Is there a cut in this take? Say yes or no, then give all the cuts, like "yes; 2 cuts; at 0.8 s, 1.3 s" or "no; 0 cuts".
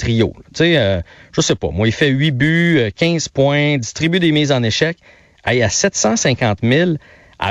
no; 0 cuts